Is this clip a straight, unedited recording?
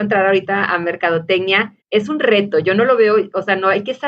no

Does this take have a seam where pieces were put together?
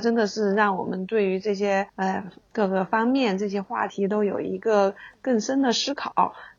yes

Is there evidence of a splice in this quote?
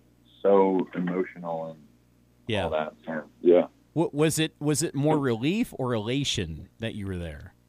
no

